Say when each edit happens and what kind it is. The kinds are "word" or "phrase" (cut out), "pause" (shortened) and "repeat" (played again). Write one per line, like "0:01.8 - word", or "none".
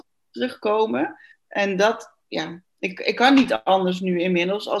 0:01.3 - pause

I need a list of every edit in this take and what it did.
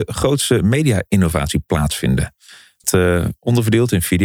0:02.8 - word

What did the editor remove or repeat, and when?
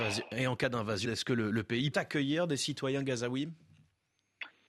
0:01.0 - word
0:01.9 - word

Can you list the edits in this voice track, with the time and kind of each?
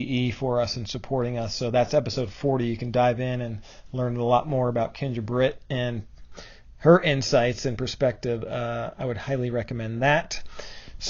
none

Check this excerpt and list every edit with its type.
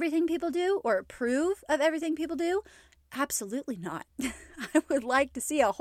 0:04.1 - pause

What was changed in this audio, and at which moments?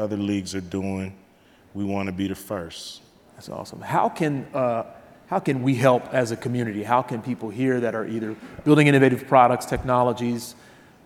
none

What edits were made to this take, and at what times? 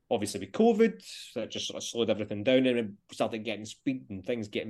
none

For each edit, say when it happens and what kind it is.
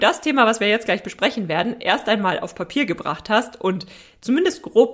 none

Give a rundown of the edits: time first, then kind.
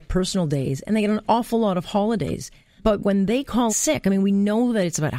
0:02.8 - word
0:03.7 - word

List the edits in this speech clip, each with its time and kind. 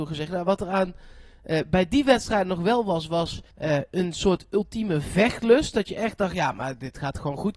0:03.5 - pause

